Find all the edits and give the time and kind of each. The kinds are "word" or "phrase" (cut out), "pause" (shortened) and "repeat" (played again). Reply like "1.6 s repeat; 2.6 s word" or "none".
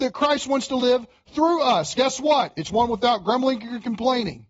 none